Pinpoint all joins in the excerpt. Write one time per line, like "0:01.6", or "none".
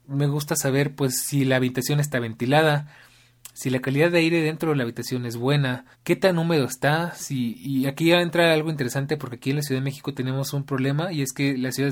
0:05.9